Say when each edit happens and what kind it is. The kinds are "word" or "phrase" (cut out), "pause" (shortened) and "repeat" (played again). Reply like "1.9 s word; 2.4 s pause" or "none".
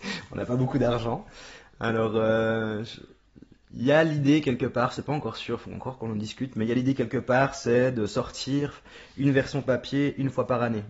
none